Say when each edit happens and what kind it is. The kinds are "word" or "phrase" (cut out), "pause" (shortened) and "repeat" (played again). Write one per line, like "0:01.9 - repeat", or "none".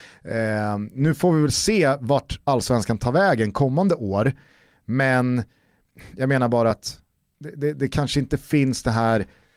none